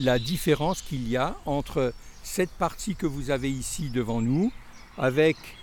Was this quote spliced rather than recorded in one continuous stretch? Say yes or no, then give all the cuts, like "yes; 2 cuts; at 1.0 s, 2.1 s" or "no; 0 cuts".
no; 0 cuts